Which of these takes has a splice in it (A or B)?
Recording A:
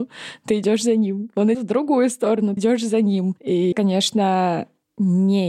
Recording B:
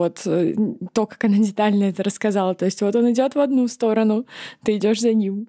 A